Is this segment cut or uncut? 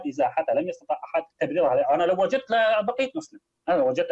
cut